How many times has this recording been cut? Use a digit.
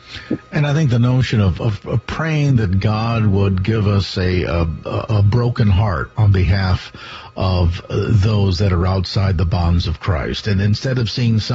0